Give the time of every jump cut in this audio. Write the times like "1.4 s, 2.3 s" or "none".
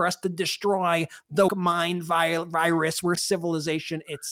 1.5 s, 3.2 s